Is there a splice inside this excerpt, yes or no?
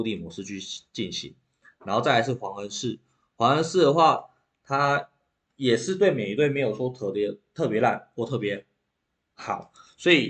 no